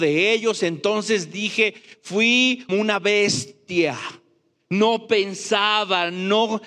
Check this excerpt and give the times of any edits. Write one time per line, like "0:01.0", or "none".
0:02.7